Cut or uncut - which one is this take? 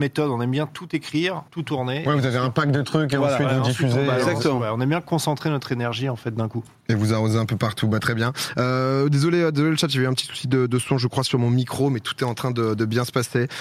cut